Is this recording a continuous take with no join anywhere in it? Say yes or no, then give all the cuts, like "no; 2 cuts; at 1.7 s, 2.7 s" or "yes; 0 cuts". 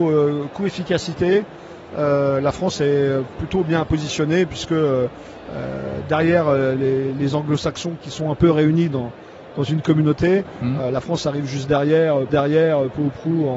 no; 1 cut; at 12.3 s